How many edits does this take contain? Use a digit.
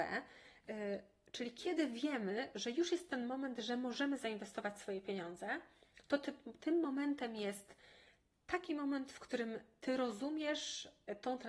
0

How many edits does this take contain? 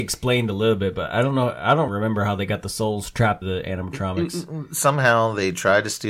2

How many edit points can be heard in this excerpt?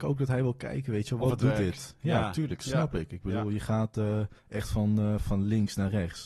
1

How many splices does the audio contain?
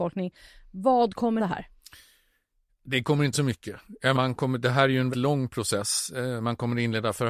4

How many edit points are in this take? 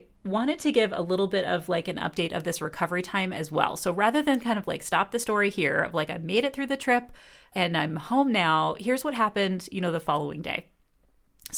1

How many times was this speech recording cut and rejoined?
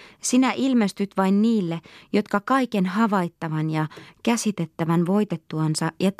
0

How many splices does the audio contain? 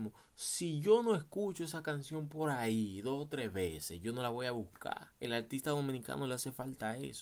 1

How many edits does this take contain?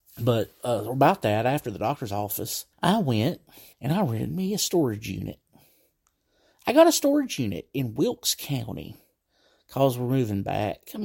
2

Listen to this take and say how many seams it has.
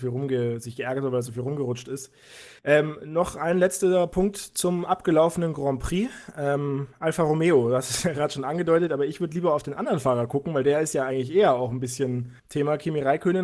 2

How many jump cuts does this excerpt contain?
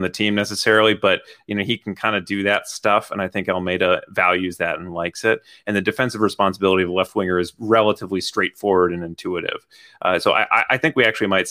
0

